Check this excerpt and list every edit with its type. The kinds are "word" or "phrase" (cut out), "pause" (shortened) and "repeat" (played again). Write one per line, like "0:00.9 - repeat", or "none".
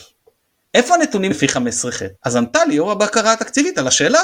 0:01.3 - word
0:02.2 - pause